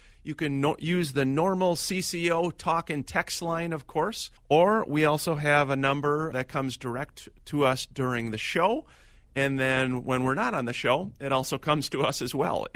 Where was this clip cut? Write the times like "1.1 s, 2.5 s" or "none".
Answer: 4.4 s, 6.3 s